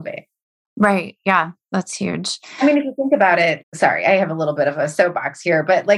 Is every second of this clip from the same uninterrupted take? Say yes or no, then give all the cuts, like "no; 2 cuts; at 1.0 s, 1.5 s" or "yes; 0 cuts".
no; 1 cut; at 3.6 s